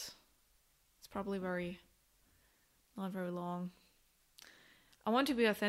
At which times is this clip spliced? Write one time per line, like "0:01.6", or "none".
none

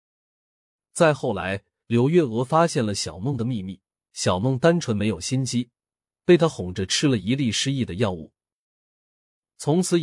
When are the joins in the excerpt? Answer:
0:03.9

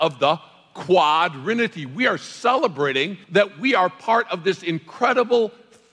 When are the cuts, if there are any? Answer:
0:03.2

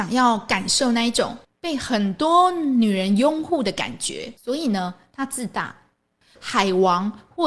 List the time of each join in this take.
0:01.4
0:04.4

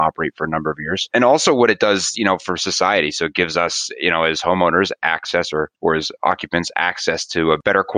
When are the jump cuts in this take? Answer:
0:05.7

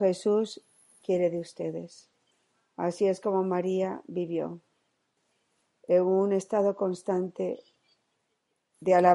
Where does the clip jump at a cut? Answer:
none

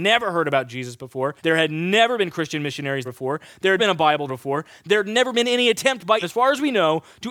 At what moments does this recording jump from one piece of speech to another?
0:01.4
0:03.0
0:03.8
0:04.3
0:06.2

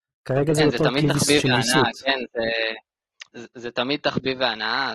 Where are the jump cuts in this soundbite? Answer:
0:03.3

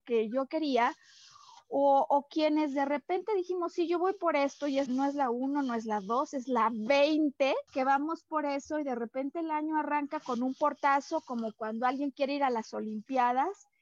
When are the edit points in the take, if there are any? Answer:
0:04.9
0:07.7

